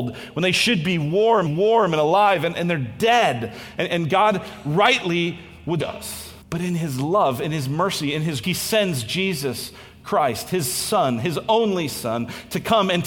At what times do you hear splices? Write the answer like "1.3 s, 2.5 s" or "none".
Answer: 1.5 s, 5.8 s, 6.4 s, 8.4 s